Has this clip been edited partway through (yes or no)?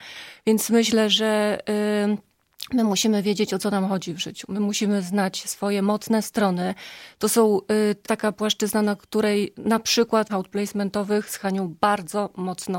yes